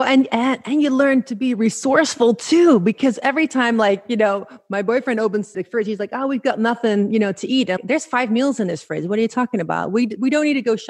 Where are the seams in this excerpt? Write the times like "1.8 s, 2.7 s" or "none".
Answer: 5.5 s, 7.8 s